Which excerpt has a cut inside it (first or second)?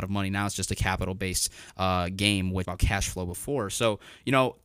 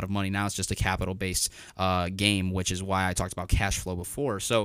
first